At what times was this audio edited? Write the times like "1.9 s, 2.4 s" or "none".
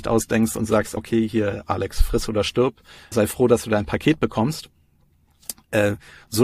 1.0 s, 3.1 s